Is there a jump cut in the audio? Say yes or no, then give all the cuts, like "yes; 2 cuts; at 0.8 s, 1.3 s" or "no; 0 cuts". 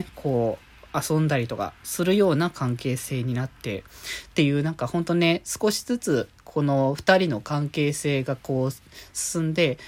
no; 0 cuts